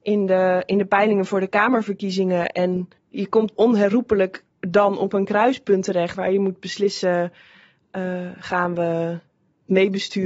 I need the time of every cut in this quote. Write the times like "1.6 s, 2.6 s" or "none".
3.0 s, 3.5 s, 4.5 s, 6.1 s